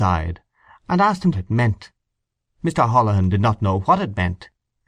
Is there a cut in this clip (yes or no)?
yes